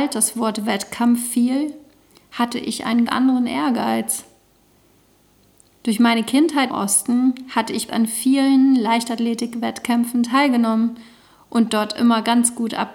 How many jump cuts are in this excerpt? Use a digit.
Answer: 3